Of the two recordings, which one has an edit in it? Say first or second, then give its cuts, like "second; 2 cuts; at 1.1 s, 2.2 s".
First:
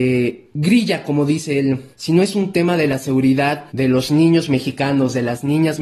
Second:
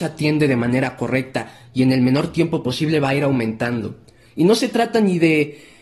first; 2 cuts; at 1.9 s, 3.7 s